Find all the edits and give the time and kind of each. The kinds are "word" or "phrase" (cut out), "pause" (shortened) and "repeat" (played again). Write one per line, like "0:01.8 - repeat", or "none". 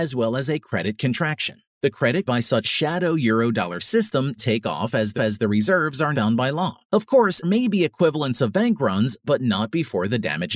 0:01.7 - pause
0:02.3 - word
0:02.6 - phrase
0:04.4 - phrase
0:05.2 - repeat
0:06.1 - word
0:06.8 - pause
0:07.4 - word